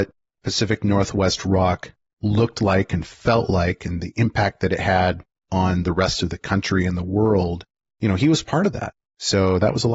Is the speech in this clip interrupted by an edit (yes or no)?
no